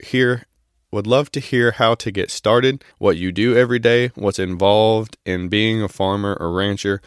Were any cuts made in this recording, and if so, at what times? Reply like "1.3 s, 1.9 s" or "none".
2.9 s